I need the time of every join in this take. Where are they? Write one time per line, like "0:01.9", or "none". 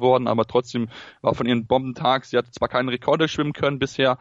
0:01.7